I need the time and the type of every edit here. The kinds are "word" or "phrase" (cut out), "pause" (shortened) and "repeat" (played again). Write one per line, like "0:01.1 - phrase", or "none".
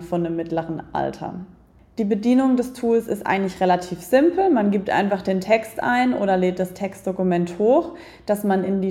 none